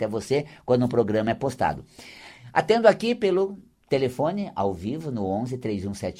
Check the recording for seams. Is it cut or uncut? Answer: uncut